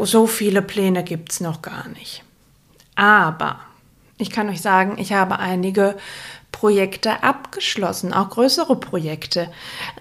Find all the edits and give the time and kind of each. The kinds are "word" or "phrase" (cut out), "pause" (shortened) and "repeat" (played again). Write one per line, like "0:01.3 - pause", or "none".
none